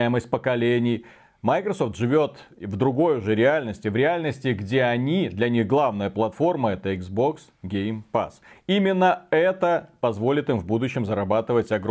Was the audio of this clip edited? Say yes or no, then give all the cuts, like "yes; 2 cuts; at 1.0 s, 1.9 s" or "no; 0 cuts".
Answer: no; 0 cuts